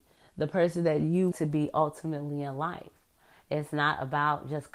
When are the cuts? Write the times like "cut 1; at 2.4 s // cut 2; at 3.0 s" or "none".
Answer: cut 1; at 1.3 s